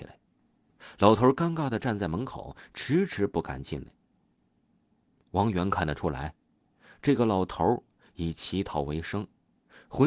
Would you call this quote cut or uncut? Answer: uncut